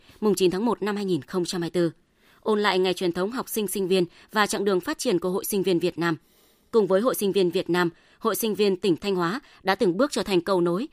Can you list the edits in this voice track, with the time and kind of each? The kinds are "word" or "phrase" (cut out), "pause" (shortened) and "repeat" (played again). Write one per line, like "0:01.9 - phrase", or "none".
none